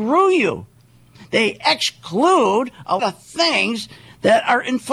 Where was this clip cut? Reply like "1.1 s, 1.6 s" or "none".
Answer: 3.0 s